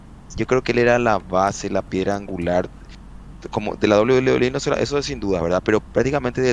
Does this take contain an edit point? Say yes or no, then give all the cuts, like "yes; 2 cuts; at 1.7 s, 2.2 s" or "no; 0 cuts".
no; 0 cuts